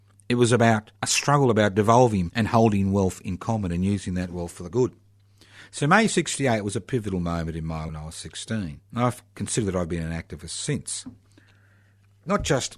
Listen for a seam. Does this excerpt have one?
yes; 5 cuts; at 1.0 s, 2.3 s, 4.7 s, 7.9 s, 8.9 s

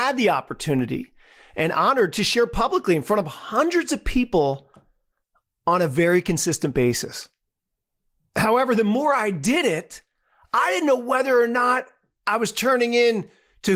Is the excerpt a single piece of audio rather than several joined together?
yes; 0 cuts

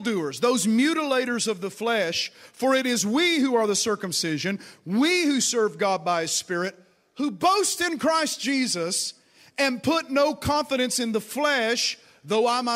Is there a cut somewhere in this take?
no; 0 cuts

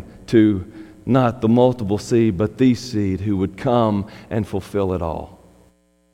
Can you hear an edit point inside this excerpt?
no; 0 cuts

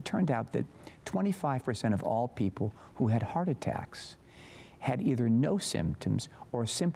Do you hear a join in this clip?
no; 0 cuts

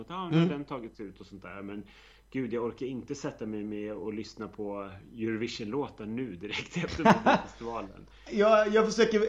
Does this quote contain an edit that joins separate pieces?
no; 0 cuts

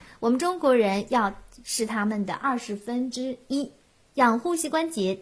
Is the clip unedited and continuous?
no; 1 cut; at 3.8 s

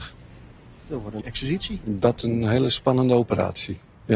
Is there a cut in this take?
yes; 2 cuts; at 1.2 s, 2.2 s

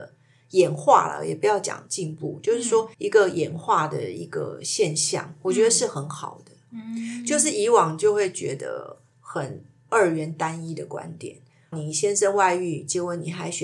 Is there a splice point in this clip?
yes; 2 cuts; at 2.9 s, 11.7 s

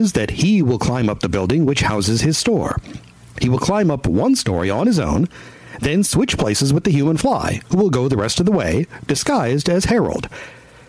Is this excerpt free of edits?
yes; 0 cuts

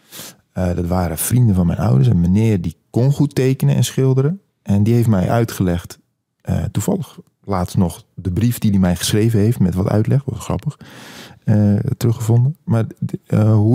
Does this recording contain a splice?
no; 0 cuts

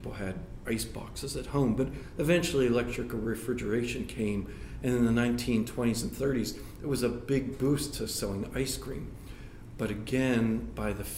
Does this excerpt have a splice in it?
no; 0 cuts

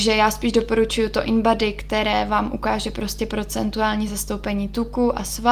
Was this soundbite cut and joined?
no; 0 cuts

